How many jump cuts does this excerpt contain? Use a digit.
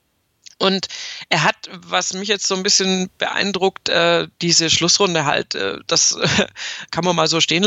0